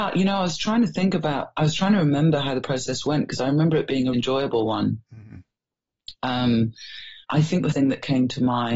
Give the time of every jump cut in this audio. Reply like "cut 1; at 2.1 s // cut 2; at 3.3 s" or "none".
cut 1; at 4.1 s // cut 2; at 7.2 s // cut 3; at 7.7 s